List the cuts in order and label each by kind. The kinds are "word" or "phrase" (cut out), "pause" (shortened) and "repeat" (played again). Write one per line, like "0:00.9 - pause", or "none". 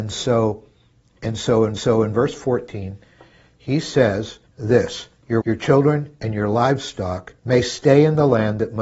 0:01.8 - repeat
0:04.5 - pause
0:05.4 - word
0:07.4 - pause